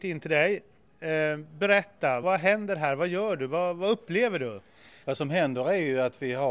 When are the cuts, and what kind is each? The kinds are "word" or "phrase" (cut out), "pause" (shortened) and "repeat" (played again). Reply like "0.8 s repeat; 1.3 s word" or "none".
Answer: 2.2 s word; 5.0 s pause